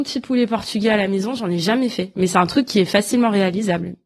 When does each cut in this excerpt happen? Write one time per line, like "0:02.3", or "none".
none